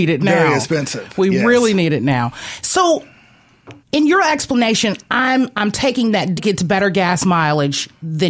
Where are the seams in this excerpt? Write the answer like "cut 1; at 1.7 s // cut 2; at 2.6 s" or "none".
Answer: cut 1; at 3.8 s // cut 2; at 5.5 s // cut 3; at 6.4 s